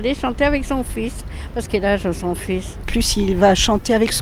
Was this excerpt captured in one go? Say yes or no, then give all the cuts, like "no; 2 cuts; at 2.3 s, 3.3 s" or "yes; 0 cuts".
no; 2 cuts; at 1.7 s, 2.8 s